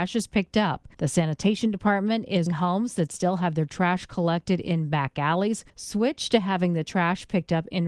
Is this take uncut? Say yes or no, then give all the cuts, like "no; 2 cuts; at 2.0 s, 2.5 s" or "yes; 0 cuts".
no; 3 cuts; at 0.9 s, 2.5 s, 5.7 s